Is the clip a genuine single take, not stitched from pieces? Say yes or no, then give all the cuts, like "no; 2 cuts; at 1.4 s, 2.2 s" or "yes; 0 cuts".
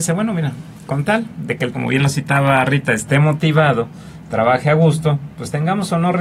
no; 1 cut; at 1.7 s